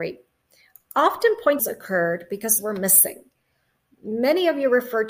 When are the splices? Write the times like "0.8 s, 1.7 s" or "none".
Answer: 1.6 s, 2.6 s